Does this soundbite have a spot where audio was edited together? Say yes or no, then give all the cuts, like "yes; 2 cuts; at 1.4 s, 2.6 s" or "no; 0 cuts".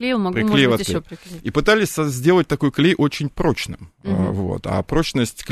no; 0 cuts